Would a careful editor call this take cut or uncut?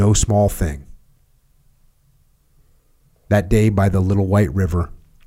uncut